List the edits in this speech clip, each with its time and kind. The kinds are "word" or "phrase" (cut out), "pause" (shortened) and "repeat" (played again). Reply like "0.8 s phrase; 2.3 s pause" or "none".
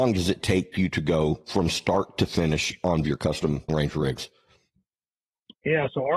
3.0 s phrase; 3.7 s word